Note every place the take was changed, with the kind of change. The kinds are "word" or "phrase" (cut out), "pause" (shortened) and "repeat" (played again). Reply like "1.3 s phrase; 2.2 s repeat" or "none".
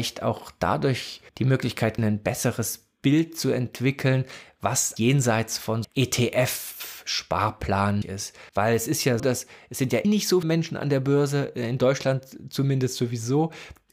1.3 s pause; 2.0 s phrase; 5.0 s word; 5.8 s phrase; 8.0 s word; 8.5 s pause; 9.2 s word; 10.0 s word; 10.4 s word